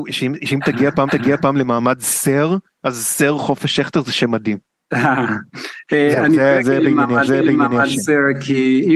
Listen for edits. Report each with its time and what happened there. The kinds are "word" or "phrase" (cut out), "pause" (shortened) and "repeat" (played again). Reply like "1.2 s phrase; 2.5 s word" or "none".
1.1 s repeat; 7.3 s repeat